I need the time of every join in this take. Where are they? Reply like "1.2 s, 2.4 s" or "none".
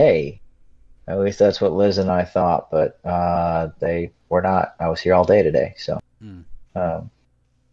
4.2 s, 6.6 s